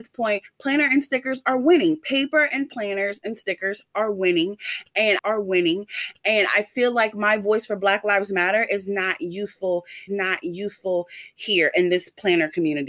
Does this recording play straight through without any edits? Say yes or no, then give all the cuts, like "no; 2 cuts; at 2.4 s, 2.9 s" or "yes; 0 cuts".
no; 2 cuts; at 5.2 s, 10.1 s